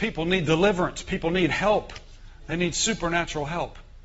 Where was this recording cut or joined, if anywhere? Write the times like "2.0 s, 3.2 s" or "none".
none